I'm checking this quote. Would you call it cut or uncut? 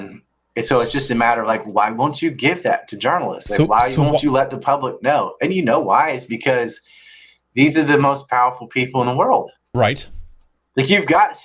uncut